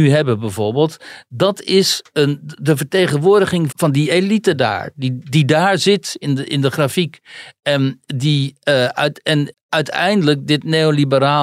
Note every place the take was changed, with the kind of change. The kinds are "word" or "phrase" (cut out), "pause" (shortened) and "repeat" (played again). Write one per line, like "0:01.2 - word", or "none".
0:03.7 - word
0:09.5 - phrase